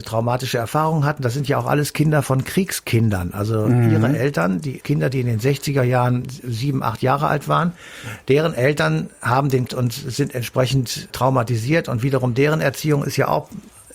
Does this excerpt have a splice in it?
yes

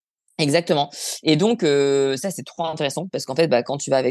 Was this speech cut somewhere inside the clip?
no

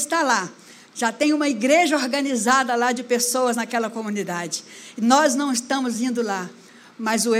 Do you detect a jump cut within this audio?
no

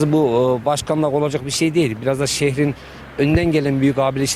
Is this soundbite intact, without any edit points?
yes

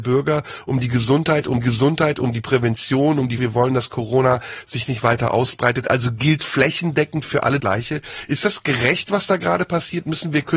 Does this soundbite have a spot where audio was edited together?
yes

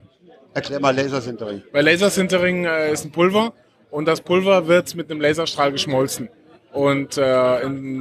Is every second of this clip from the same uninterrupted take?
yes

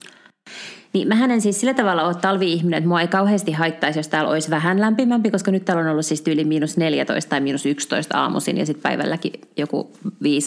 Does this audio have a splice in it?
no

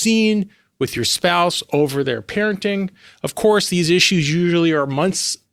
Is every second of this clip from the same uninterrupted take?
yes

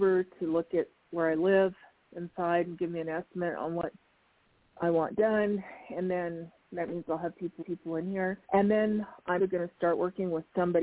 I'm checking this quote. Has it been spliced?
yes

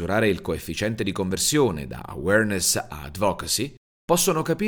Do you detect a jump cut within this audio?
no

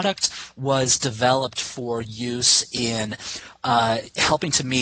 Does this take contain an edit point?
no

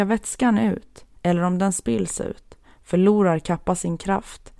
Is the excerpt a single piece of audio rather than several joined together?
no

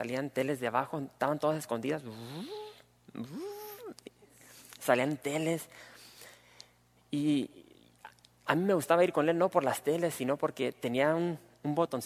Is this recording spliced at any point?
no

